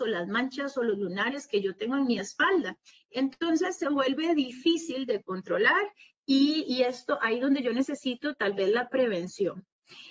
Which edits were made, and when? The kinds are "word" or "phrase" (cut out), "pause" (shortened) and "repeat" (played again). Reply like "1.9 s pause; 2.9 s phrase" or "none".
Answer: none

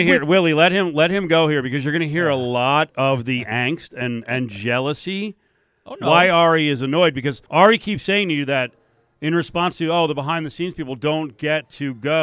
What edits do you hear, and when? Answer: 7.5 s pause

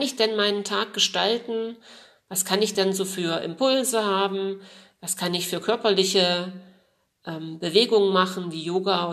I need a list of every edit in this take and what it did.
none

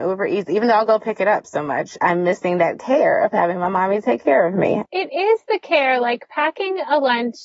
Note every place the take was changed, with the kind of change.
none

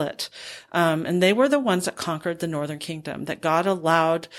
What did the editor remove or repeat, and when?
none

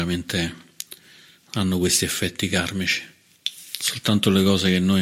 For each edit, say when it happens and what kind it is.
none

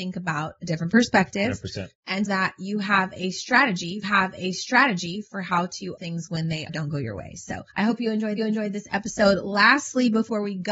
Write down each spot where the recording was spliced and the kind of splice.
2.3 s word; 4.0 s repeat; 6.0 s word; 6.7 s phrase; 7.7 s pause; 8.4 s repeat

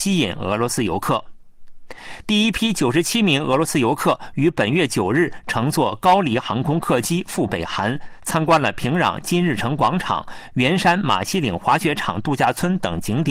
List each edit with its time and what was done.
none

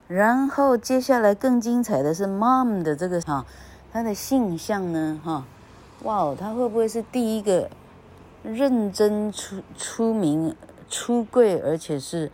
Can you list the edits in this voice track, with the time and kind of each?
3.2 s word

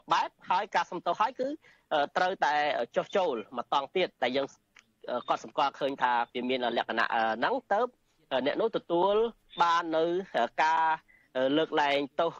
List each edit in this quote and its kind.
4.2 s pause; 6.3 s pause

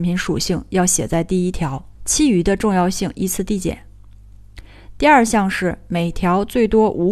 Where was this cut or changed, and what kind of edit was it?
2.0 s pause

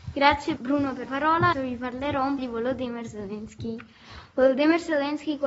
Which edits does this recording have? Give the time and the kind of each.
1.1 s word; 1.5 s word; 2.4 s word

